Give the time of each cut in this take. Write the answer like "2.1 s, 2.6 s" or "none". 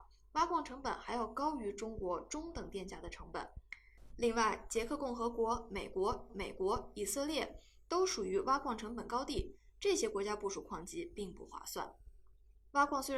6.3 s